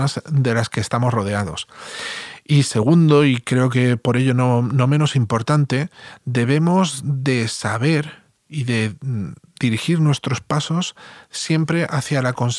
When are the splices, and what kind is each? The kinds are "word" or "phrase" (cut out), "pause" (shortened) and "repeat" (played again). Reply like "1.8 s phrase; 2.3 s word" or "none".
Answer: none